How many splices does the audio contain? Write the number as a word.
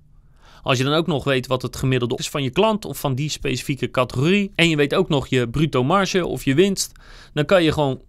two